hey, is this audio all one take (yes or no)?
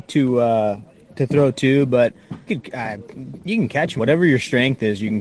no